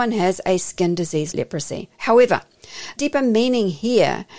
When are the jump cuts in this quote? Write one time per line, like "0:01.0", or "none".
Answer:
0:01.3
0:03.0